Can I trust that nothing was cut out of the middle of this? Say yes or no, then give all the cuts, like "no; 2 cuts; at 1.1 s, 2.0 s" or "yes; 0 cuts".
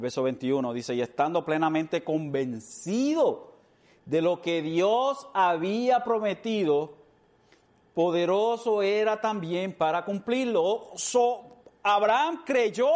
yes; 0 cuts